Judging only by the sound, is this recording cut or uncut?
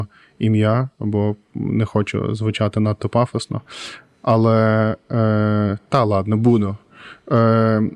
uncut